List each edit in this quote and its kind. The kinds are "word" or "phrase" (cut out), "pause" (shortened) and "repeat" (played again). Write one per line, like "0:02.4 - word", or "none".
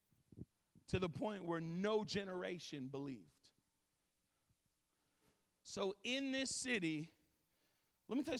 none